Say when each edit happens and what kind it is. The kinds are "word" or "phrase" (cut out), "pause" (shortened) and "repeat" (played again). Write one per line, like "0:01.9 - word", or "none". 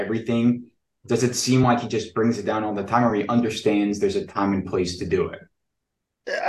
none